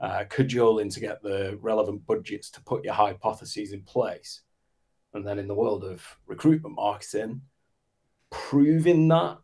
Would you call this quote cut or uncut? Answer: uncut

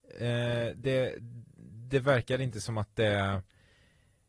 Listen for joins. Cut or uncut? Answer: uncut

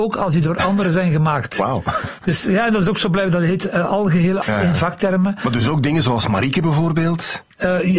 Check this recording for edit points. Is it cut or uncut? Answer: cut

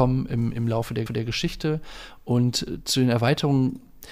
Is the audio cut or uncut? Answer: cut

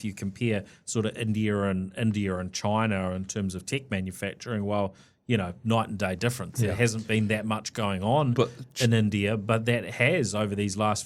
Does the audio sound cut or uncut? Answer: uncut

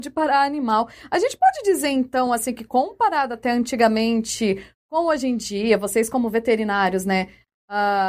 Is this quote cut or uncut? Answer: uncut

